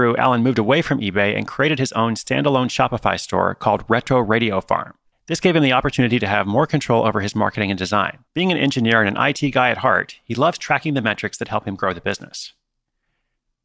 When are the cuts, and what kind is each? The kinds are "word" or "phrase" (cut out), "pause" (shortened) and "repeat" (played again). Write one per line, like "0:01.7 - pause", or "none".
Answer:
0:05.1 - pause
0:08.3 - pause